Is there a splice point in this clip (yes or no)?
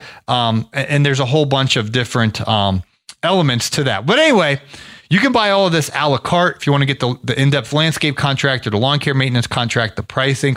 no